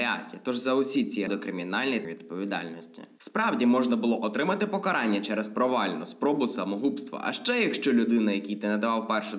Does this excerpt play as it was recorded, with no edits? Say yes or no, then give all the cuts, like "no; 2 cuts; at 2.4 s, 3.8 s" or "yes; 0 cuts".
no; 2 cuts; at 1.3 s, 2.0 s